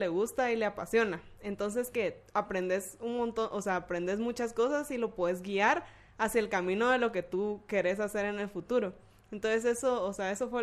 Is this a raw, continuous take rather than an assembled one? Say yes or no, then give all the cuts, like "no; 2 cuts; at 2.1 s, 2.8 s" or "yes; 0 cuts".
yes; 0 cuts